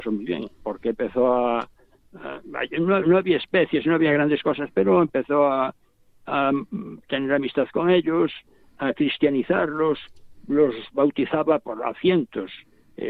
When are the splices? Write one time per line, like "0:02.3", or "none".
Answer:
none